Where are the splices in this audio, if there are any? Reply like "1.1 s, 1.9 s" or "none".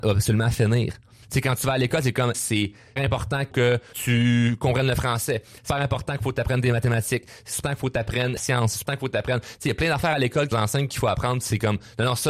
2.3 s, 3.0 s, 3.5 s, 3.9 s, 5.7 s, 7.6 s, 8.4 s, 8.9 s, 10.5 s